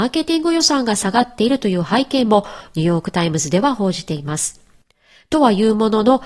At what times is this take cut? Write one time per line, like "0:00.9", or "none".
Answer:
none